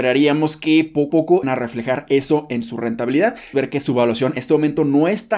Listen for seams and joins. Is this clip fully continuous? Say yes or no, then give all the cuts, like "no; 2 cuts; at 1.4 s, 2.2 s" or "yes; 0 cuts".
no; 4 cuts; at 1.1 s, 1.4 s, 3.5 s, 4.4 s